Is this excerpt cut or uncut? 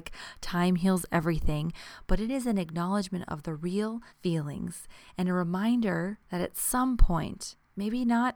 cut